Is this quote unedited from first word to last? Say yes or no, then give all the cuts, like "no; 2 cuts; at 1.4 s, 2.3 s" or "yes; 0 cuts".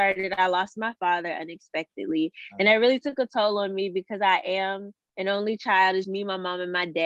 no; 1 cut; at 6.0 s